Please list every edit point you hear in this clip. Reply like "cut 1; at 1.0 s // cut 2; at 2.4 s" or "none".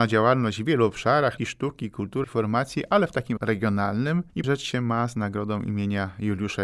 cut 1; at 1.4 s // cut 2; at 2.2 s // cut 3; at 3.4 s // cut 4; at 4.4 s